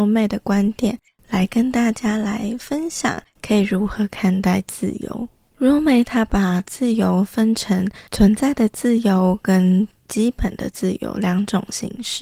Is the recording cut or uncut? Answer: cut